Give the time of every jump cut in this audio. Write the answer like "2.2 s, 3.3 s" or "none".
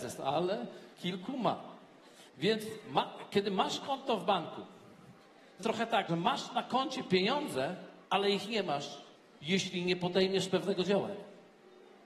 0.9 s, 2.3 s, 5.6 s, 6.1 s, 8.0 s, 9.1 s